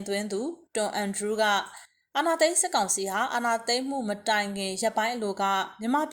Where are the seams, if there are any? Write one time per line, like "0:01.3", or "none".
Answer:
none